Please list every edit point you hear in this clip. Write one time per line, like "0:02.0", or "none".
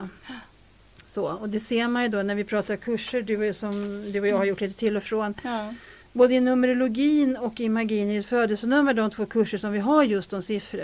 0:06.0